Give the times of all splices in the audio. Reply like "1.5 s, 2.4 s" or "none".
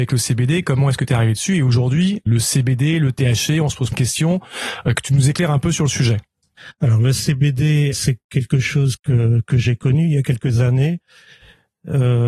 2.3 s, 3.9 s, 7.9 s, 9.0 s